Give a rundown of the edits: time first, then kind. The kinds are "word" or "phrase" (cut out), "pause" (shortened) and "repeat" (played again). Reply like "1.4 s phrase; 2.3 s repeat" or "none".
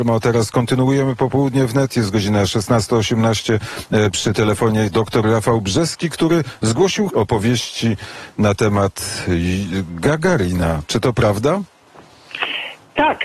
7.1 s word